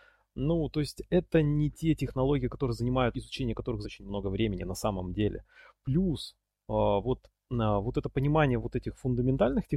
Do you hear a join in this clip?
yes; 2 cuts; at 3.1 s, 3.8 s

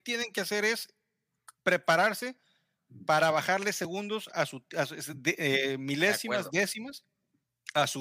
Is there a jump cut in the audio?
no; 0 cuts

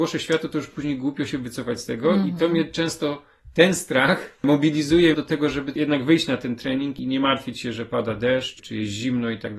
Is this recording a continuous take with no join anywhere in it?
no; 1 cut; at 5.1 s

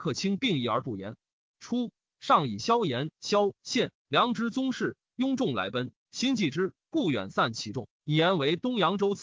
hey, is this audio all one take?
yes; 0 cuts

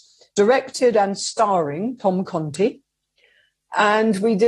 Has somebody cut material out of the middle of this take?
no; 0 cuts

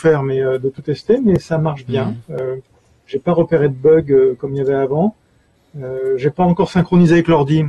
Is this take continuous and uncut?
yes; 0 cuts

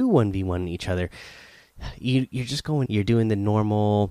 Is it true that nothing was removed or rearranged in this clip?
no; 1 cut; at 2.9 s

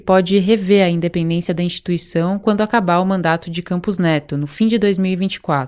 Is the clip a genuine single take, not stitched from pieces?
yes; 0 cuts

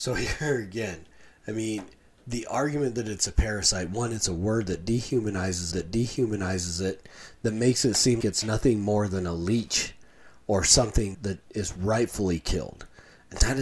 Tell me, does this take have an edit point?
yes; 3 cuts; at 5.7 s, 8.2 s, 11.1 s

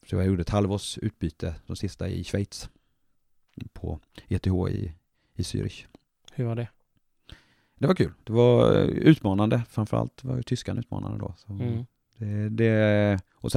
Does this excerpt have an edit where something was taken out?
no; 0 cuts

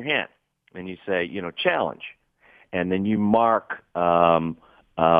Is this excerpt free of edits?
yes; 0 cuts

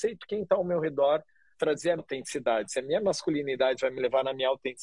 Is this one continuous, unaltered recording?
no; 2 cuts; at 1.5 s, 2.0 s

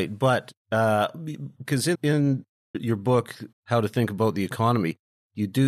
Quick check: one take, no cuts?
no; 4 cuts; at 1.6 s, 1.9 s, 2.7 s, 3.5 s

